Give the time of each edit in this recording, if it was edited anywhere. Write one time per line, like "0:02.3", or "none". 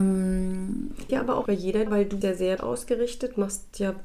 0:01.1
0:01.5
0:01.9
0:02.2
0:02.6

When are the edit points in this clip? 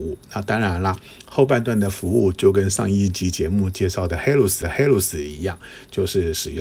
0:04.6

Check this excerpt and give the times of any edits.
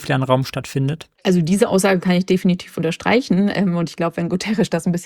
0:01.2

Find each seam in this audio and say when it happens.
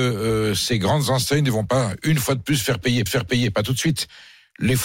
0:03.1

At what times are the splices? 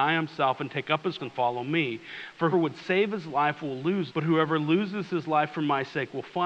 0:01.2
0:02.5
0:04.1

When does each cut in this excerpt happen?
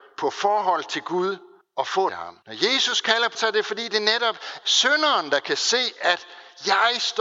0:01.6
0:02.1
0:02.4
0:03.3
0:04.6

